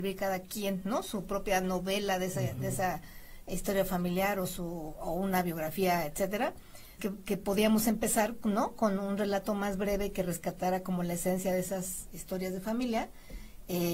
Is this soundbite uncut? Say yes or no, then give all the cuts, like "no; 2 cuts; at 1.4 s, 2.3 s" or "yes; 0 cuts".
no; 1 cut; at 7.0 s